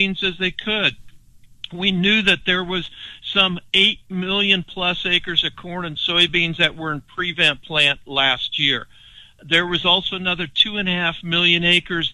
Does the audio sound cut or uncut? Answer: uncut